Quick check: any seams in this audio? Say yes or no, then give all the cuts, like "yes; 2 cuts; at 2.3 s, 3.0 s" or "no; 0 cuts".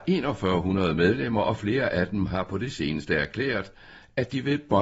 no; 0 cuts